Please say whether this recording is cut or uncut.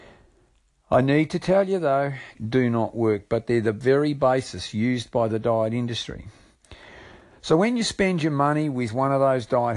cut